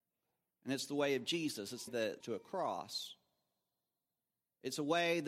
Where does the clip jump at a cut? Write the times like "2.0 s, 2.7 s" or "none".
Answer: 1.9 s, 2.2 s

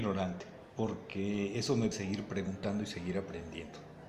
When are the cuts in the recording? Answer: 1.9 s

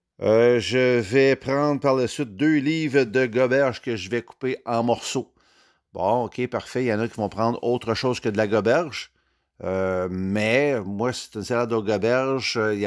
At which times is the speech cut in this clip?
none

